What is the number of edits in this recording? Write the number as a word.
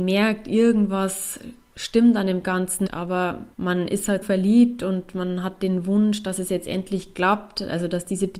three